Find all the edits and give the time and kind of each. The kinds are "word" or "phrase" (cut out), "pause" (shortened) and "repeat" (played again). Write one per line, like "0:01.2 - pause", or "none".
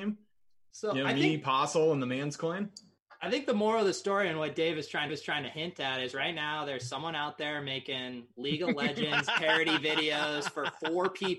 0:05.1 - repeat